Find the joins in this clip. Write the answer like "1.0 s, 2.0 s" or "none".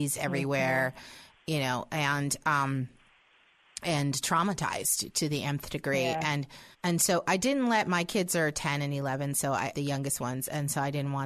6.7 s, 9.7 s